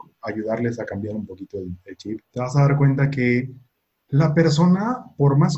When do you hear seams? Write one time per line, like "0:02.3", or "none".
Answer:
0:02.2
0:03.7